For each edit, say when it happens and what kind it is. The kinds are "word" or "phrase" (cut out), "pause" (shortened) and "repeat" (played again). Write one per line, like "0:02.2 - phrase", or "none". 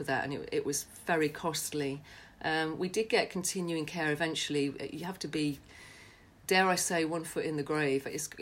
none

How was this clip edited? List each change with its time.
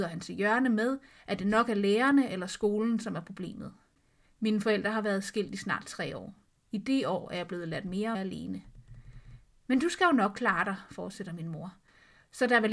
0:08.1 - word

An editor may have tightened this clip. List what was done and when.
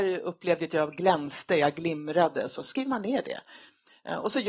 none

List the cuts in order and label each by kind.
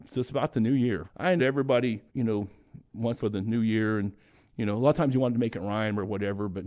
0:01.1 - word
0:01.4 - phrase
0:02.1 - pause
0:03.2 - phrase

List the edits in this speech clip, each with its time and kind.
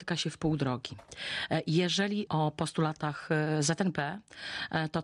0:02.3 - word

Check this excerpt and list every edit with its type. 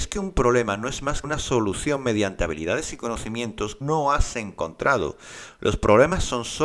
0:01.2 - word
0:03.8 - word

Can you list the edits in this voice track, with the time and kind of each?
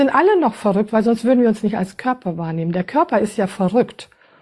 none

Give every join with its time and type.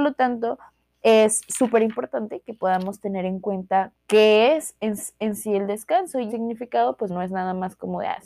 0:03.9 - word
0:05.0 - repeat
0:06.3 - phrase
0:07.1 - word

